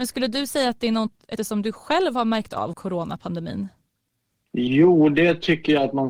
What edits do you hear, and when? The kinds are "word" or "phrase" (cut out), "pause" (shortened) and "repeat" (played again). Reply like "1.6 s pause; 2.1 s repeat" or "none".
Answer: 1.4 s word; 2.7 s phrase